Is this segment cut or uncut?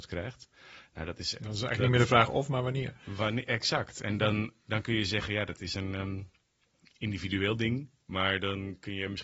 uncut